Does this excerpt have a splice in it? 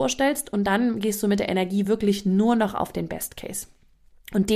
no; 0 cuts

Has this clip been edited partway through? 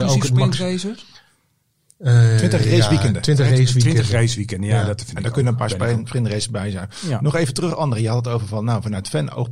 no; 0 cuts

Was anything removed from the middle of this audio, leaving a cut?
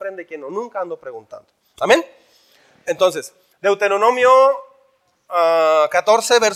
no; 0 cuts

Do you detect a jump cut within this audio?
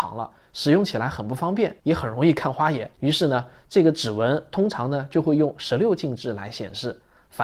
yes; 2 cuts; at 1.8 s, 2.9 s

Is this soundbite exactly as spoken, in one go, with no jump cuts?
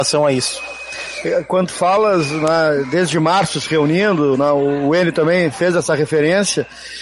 yes; 0 cuts

